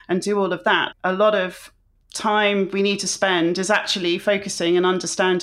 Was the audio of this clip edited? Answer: yes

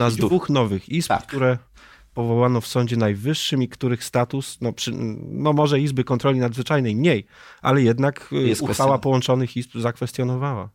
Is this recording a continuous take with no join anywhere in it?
yes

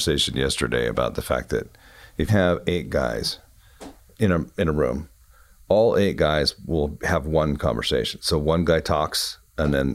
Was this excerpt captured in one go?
no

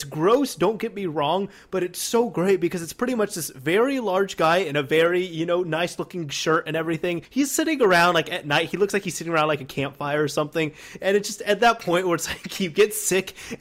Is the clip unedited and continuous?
no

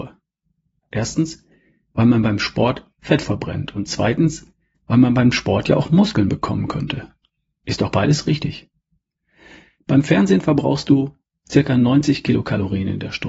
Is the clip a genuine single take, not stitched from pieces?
yes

